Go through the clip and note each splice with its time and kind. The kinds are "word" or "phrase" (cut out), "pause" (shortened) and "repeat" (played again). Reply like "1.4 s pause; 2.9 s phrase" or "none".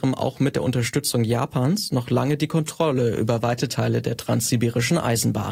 none